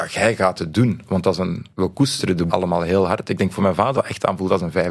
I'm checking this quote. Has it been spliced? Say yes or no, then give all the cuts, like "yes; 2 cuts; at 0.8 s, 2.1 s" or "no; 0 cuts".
yes; 3 cuts; at 1.7 s, 2.5 s, 3.9 s